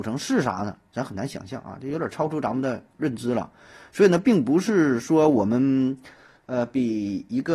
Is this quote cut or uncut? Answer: uncut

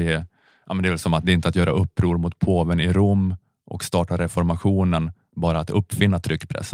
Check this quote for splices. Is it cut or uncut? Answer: uncut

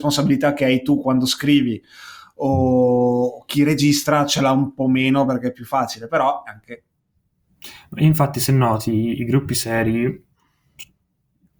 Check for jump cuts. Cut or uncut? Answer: uncut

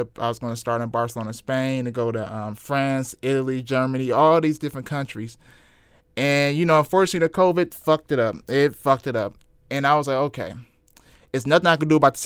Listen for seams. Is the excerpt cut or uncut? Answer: uncut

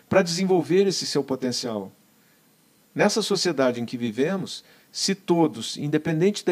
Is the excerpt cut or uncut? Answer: uncut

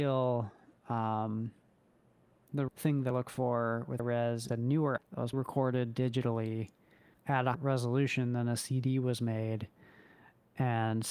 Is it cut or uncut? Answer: cut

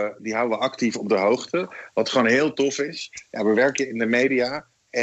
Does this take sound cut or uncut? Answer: uncut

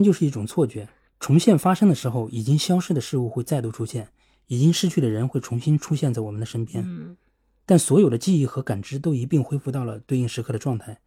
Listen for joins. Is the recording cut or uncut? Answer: uncut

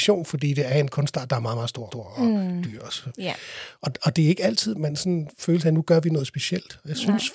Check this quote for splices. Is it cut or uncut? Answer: cut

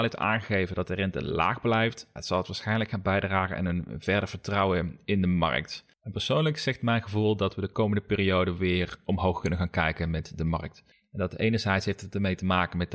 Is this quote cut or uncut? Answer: cut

